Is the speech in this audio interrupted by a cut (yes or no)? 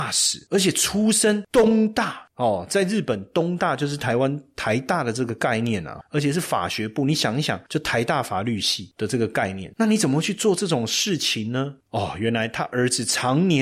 yes